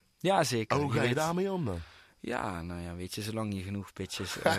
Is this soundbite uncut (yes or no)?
yes